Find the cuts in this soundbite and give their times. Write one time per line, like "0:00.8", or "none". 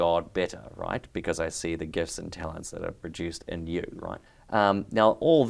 0:04.3